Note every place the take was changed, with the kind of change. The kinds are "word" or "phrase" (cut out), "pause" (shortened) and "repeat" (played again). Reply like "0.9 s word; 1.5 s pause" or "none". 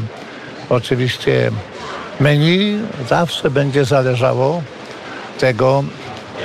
5.3 s word